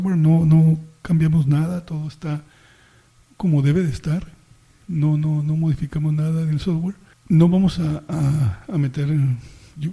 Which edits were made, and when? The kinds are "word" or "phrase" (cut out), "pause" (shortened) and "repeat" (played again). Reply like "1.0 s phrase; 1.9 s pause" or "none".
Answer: none